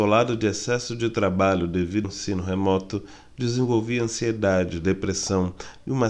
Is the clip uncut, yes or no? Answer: no